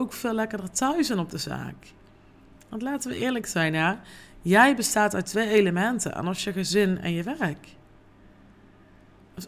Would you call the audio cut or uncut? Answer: uncut